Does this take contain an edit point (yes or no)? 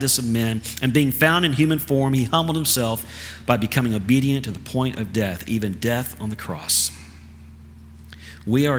no